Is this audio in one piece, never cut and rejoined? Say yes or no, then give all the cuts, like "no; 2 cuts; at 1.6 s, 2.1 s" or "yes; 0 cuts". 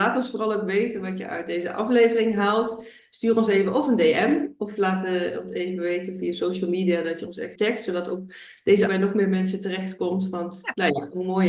no; 2 cuts; at 7.6 s, 8.9 s